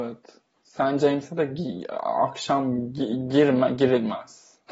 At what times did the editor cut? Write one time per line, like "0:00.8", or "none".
none